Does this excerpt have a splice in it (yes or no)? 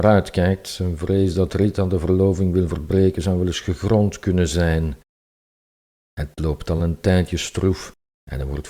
no